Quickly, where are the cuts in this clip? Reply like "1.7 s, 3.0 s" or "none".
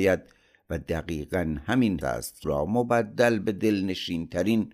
2.0 s, 2.4 s